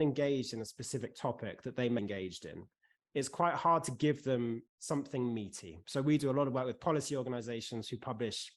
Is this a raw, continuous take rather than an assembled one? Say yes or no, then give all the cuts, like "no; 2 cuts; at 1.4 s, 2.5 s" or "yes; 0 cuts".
no; 2 cuts; at 2.0 s, 4.7 s